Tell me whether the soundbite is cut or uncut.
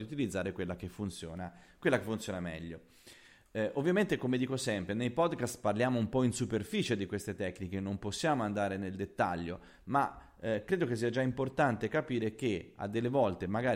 uncut